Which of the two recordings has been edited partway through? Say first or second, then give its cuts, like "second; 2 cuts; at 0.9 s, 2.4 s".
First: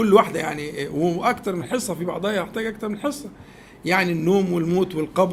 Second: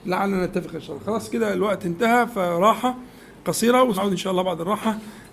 second; 1 cut; at 3.9 s